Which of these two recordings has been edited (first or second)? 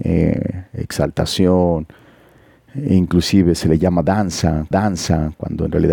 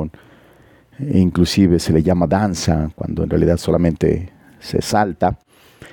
first